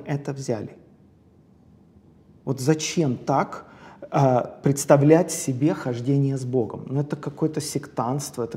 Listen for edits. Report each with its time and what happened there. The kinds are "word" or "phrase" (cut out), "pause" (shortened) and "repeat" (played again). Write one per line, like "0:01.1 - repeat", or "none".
none